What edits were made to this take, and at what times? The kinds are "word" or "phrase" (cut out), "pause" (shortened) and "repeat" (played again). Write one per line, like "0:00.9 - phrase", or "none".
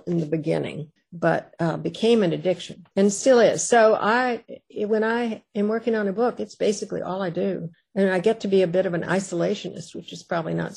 0:01.0 - pause
0:02.9 - pause
0:07.7 - pause